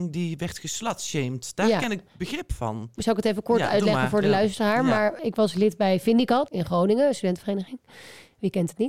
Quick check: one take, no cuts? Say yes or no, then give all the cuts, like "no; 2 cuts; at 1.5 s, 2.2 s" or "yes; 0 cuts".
no; 3 cuts; at 3.0 s, 5.2 s, 6.5 s